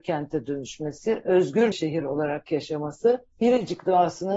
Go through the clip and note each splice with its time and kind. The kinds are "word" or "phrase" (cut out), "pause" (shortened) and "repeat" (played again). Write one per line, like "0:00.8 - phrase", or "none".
0:01.7 - word
0:03.3 - pause